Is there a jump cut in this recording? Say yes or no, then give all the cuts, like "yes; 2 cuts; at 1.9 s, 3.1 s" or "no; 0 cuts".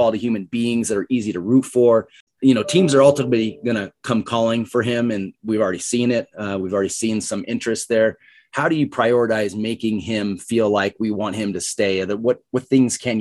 no; 0 cuts